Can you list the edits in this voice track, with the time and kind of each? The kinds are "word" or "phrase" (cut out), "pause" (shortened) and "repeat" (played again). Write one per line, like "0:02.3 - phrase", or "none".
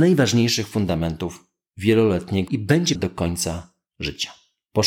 0:02.5 - word
0:03.0 - word